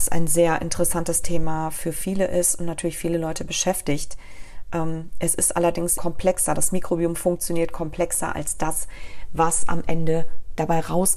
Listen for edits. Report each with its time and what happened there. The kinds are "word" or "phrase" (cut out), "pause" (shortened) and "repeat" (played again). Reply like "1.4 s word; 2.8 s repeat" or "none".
6.0 s word